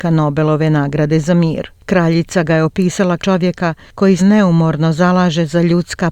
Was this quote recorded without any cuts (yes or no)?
no